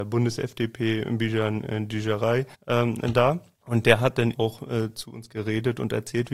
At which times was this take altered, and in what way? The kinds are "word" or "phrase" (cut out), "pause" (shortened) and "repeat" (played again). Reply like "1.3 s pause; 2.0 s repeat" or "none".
2.5 s pause; 3.6 s pause; 4.3 s word